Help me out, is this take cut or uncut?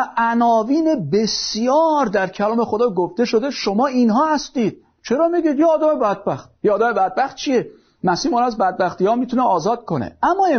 cut